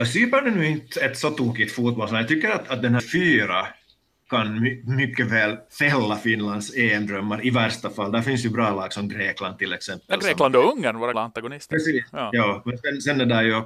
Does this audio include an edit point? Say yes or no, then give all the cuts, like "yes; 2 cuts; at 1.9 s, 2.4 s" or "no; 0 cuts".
yes; 3 cuts; at 3.0 s, 5.7 s, 11.1 s